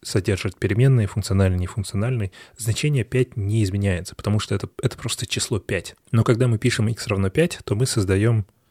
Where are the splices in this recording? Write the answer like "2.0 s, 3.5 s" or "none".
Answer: 4.7 s